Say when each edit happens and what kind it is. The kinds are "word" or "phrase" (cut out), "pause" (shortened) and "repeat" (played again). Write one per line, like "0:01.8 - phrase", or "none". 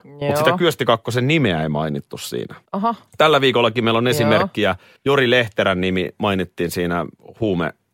0:02.7 - pause
0:05.0 - pause